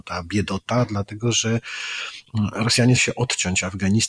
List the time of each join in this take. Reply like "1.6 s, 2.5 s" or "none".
3.0 s